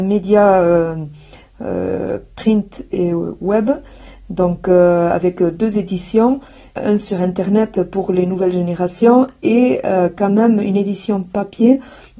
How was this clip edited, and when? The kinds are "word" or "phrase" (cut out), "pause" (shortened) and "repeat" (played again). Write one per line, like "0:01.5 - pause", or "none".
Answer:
none